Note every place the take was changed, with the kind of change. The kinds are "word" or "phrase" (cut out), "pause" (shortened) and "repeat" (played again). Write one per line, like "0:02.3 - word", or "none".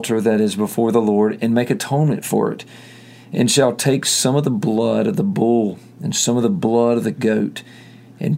none

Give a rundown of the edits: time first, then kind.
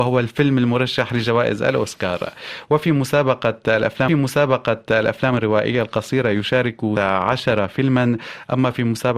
0:04.1 - repeat
0:07.0 - word

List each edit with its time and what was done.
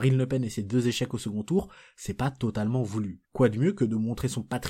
0:03.2 - pause

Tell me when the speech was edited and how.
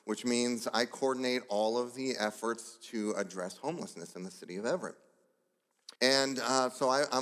0:06.0 - pause

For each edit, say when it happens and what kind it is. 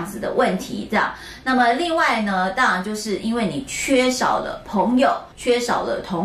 0:05.3 - pause

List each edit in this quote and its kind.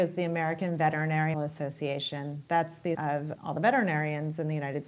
0:01.3 - word
0:02.9 - word
0:03.3 - word

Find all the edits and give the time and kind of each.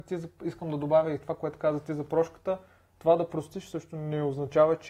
none

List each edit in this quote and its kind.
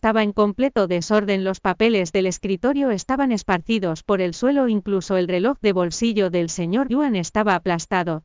0:06.8 - word

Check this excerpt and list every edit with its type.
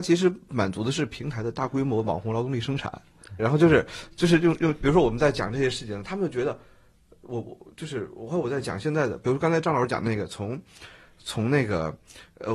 0:03.4 - phrase

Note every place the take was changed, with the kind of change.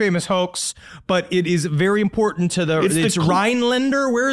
none

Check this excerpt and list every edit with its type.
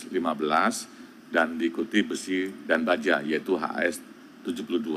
none

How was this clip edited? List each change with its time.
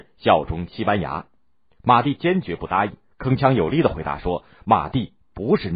none

